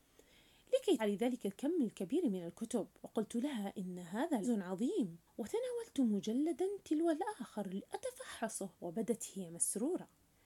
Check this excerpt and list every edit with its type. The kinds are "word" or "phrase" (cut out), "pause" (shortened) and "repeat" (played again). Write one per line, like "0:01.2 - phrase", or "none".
0:01.0 - word
0:03.0 - pause
0:04.4 - word
0:05.3 - pause
0:08.7 - pause